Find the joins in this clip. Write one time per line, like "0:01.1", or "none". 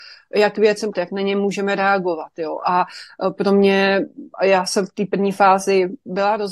0:00.9